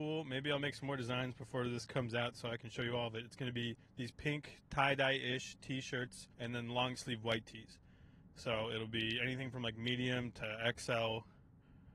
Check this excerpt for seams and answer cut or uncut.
cut